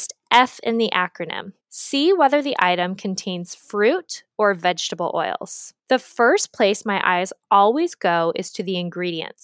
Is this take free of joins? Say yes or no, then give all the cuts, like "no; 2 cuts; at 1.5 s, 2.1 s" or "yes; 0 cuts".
no; 2 cuts; at 1.6 s, 5.8 s